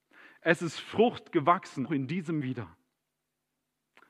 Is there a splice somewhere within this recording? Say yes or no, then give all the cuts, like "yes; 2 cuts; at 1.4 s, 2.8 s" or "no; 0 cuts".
yes; 2 cuts; at 1.9 s, 2.4 s